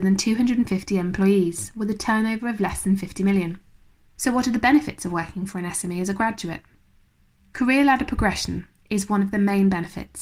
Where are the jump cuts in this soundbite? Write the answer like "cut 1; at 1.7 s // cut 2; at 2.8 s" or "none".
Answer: none